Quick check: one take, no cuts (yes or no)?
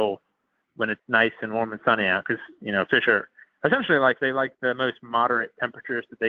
no